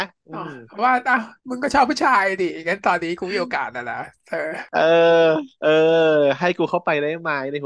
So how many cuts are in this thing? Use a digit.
2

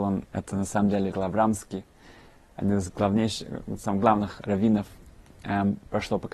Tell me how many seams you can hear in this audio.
1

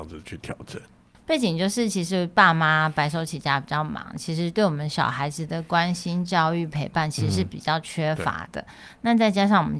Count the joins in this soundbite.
0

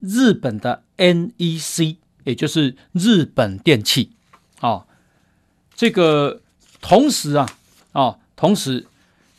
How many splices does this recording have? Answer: 1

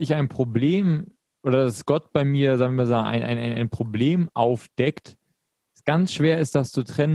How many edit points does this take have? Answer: 0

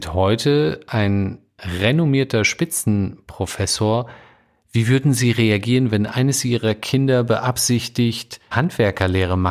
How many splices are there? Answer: 1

